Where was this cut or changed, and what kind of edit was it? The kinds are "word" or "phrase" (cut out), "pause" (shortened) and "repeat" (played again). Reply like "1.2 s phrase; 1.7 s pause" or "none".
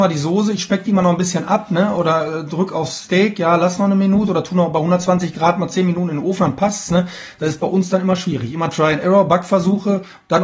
none